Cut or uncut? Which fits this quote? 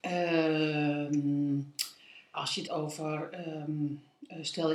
cut